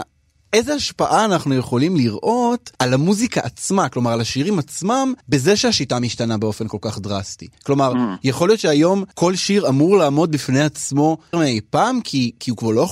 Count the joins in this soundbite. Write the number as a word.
five